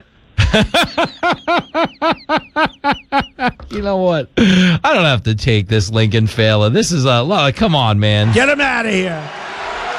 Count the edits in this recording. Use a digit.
0